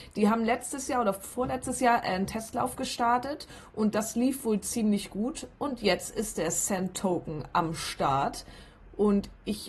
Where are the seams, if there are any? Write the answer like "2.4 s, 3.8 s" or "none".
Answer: none